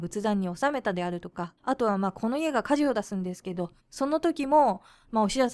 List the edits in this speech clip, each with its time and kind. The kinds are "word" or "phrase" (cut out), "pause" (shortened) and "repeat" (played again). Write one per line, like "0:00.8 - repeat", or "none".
0:01.6 - pause
0:03.8 - pause